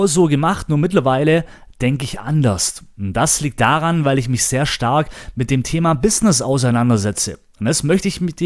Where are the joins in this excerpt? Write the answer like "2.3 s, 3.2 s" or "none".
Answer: none